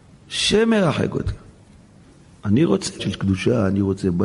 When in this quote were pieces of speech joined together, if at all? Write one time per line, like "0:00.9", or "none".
0:03.0